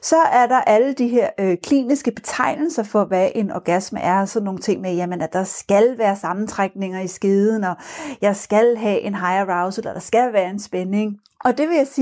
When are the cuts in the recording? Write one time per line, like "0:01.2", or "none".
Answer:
none